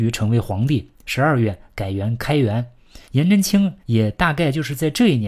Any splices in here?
yes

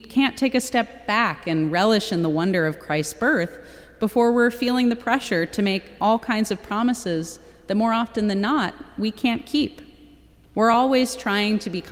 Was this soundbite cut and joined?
no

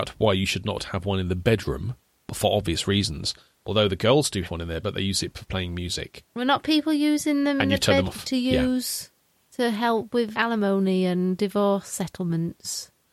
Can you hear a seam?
yes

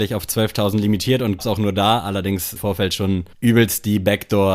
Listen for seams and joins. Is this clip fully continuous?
no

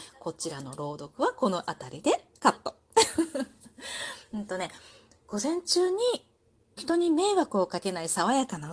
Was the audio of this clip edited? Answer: yes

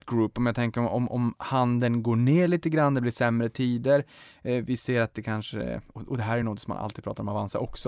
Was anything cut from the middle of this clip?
no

